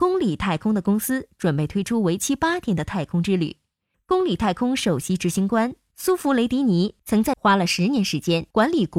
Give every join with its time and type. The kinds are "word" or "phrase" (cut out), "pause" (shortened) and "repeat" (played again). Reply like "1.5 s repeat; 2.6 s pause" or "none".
7.3 s word